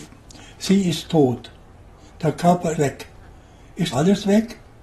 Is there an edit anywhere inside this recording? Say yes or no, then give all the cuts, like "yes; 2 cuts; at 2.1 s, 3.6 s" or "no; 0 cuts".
yes; 2 cuts; at 2.7 s, 3.9 s